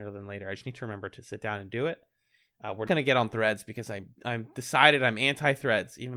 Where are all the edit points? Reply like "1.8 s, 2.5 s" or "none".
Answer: 2.9 s, 4.1 s